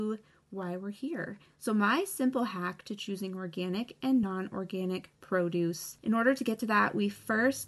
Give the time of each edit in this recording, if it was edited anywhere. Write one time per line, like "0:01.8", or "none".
none